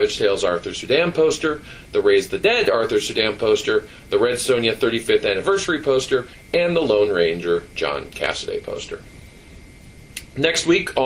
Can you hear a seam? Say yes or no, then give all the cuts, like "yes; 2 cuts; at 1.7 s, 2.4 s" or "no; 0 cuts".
no; 0 cuts